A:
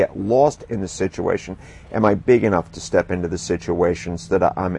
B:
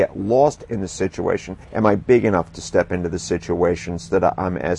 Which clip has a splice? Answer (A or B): B